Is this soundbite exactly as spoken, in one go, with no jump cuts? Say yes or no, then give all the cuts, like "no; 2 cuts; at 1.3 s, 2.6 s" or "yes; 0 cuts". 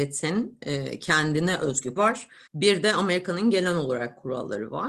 no; 2 cuts; at 2.0 s, 2.5 s